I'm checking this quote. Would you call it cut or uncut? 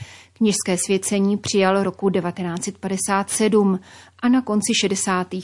uncut